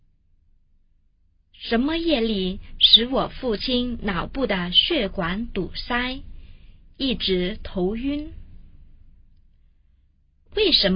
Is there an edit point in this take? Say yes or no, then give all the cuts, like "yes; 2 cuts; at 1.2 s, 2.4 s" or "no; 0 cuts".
no; 0 cuts